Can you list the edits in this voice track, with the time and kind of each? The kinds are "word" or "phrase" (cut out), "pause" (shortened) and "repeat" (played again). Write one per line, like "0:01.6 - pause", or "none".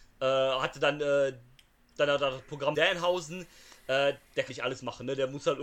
0:02.7 - phrase
0:04.5 - word